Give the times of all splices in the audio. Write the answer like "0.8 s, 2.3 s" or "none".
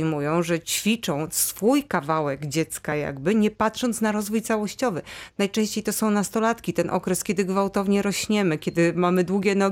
none